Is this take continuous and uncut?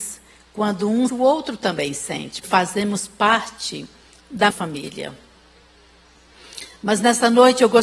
no; 3 cuts; at 1.1 s, 2.4 s, 4.5 s

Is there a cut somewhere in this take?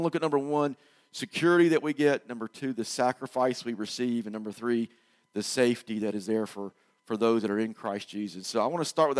no; 0 cuts

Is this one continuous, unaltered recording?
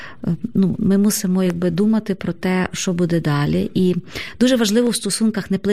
yes; 0 cuts

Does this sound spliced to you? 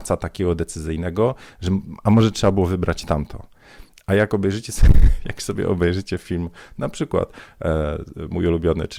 no; 0 cuts

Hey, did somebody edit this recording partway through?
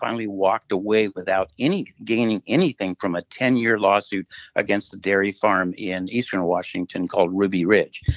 no; 0 cuts

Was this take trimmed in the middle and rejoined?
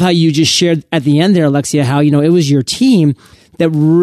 no; 0 cuts

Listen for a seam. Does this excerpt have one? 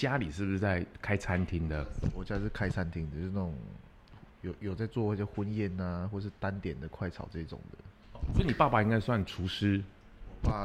no; 0 cuts

